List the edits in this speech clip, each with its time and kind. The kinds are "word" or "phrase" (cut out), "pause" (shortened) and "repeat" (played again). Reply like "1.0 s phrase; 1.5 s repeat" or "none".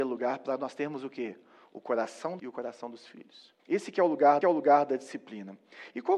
2.4 s word; 3.6 s pause; 4.4 s repeat